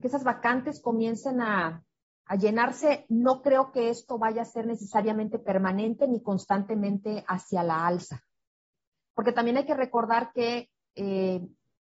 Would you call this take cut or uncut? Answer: uncut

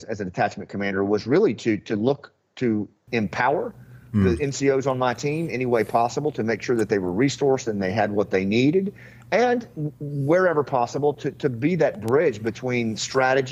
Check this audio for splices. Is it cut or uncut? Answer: uncut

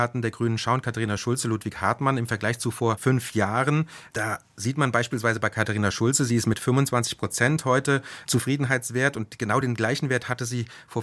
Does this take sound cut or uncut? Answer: uncut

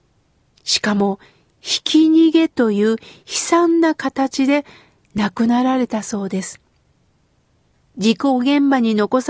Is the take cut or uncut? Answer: uncut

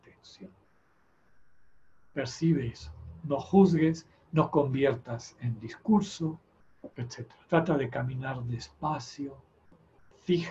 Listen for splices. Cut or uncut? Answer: cut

